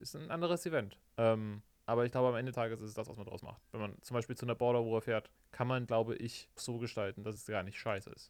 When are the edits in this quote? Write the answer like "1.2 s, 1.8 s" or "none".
1.7 s, 2.5 s, 5.9 s, 6.6 s